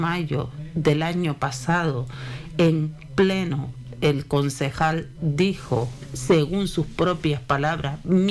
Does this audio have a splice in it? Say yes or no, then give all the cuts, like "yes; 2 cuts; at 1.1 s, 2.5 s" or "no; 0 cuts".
no; 0 cuts